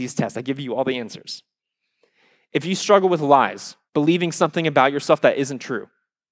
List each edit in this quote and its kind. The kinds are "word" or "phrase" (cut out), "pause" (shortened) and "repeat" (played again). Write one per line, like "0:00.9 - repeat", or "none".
0:03.9 - pause